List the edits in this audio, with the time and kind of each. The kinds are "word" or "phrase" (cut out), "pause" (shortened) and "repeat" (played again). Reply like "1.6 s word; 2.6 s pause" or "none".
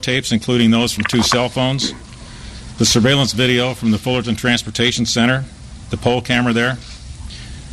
none